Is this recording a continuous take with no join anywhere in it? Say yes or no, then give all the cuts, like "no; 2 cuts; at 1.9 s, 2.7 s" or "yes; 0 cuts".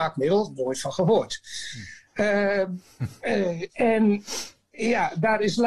yes; 0 cuts